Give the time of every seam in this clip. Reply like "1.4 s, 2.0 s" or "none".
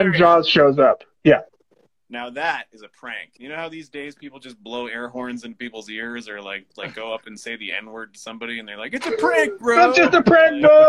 3.4 s, 6.7 s